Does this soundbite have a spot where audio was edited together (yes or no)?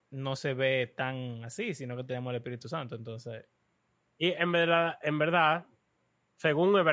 no